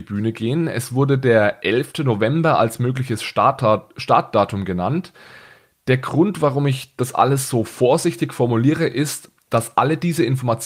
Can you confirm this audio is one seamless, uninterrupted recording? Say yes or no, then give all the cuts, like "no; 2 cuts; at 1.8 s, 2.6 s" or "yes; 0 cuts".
yes; 0 cuts